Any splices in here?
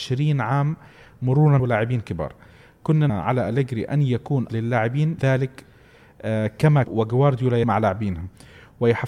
yes; 6 cuts; at 1.6 s, 3.1 s, 4.5 s, 5.2 s, 6.8 s, 7.6 s

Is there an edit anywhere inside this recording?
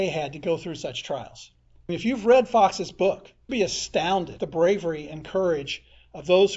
yes; 3 cuts; at 1.9 s, 3.5 s, 4.4 s

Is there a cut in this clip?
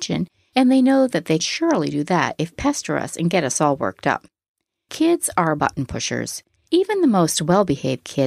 yes; 3 cuts; at 1.4 s, 2.5 s, 5.6 s

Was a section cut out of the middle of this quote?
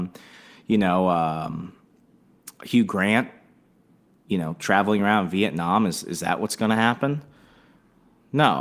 no; 0 cuts

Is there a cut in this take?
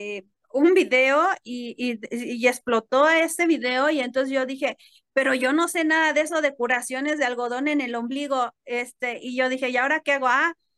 no; 0 cuts

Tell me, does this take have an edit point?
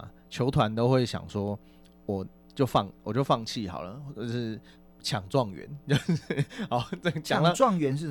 no; 0 cuts

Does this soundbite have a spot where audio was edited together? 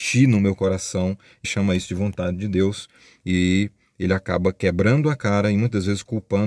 yes; 1 cut; at 1.4 s

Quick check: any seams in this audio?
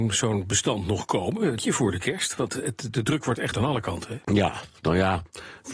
yes; 3 cuts; at 1.6 s, 3.5 s, 4.2 s

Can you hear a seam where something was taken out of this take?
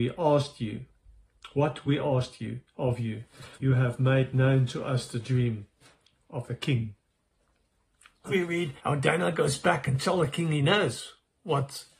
yes; 3 cuts; at 3.5 s, 8.3 s, 8.8 s

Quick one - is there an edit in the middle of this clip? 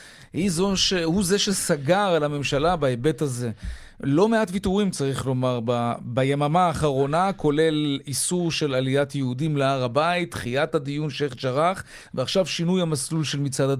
no; 0 cuts

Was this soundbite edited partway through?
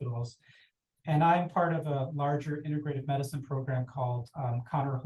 no; 0 cuts

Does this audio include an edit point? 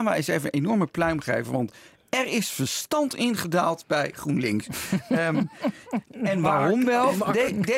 no; 0 cuts

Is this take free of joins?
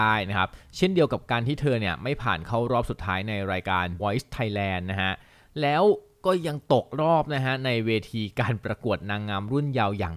no; 1 cut; at 4.0 s

